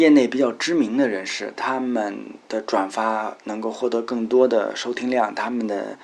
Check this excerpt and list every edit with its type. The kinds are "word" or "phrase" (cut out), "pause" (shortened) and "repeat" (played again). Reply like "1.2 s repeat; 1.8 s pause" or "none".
2.4 s pause

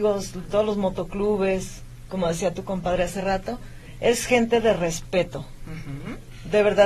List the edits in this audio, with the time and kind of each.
none

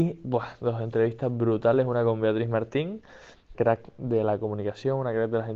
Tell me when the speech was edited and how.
3.5 s phrase

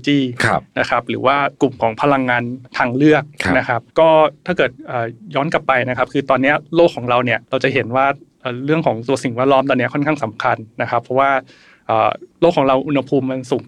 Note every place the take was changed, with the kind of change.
1.5 s pause; 2.7 s pause; 3.9 s pause; 7.4 s pause; 12.3 s pause

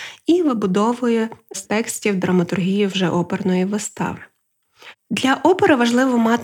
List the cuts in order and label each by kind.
1.6 s word

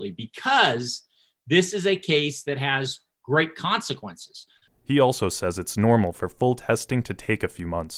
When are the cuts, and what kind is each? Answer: none

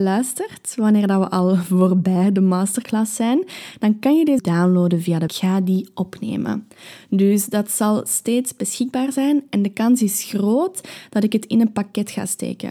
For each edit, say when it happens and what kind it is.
4.4 s phrase; 5.3 s phrase

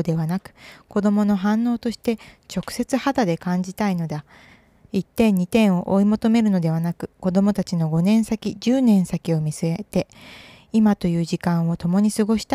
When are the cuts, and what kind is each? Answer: none

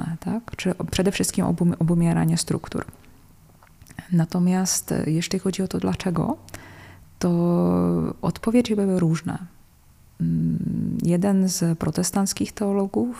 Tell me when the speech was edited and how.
none

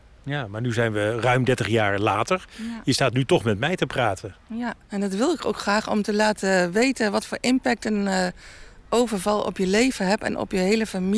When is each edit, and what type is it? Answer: 4.8 s pause

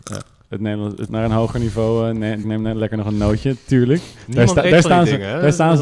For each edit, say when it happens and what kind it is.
1.1 s word; 2.4 s word

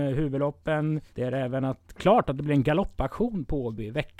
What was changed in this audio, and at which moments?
1.1 s pause

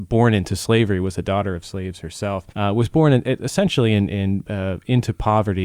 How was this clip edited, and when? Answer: 2.5 s pause

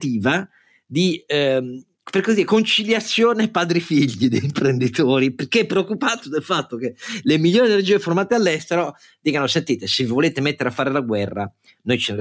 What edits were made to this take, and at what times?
none

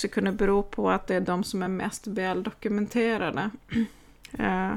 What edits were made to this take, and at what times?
none

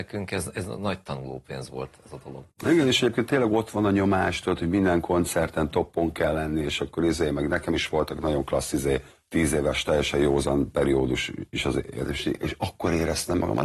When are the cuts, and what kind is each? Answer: 2.5 s pause; 9.1 s pause

